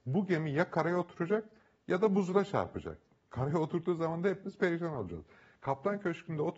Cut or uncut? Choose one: uncut